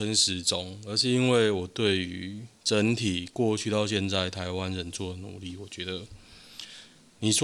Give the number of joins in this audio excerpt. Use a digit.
1